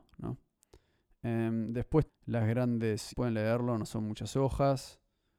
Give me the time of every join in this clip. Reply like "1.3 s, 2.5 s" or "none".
2.1 s, 3.1 s